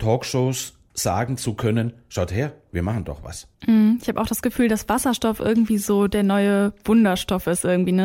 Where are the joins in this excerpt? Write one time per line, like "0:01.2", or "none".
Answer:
0:03.5